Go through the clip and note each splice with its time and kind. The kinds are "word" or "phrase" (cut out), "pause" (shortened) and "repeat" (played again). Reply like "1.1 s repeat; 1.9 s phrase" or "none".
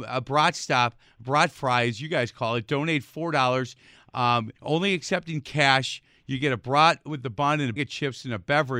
4.6 s pause; 7.8 s word